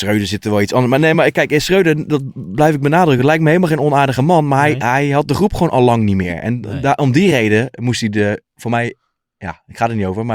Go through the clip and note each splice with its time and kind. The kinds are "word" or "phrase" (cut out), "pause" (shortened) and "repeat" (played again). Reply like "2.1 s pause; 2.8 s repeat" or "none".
none